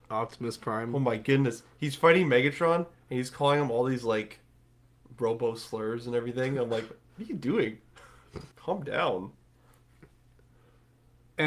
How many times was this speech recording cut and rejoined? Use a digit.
1